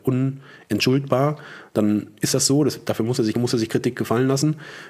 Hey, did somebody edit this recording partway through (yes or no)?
yes